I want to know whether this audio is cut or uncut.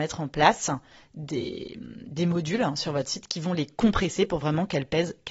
uncut